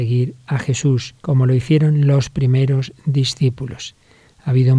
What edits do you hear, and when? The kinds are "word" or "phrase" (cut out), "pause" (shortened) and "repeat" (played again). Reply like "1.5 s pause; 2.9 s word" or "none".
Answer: 1.2 s pause